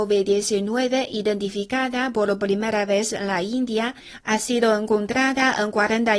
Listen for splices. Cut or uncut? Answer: uncut